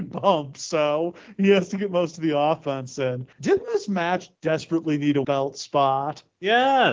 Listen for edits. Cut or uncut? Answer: cut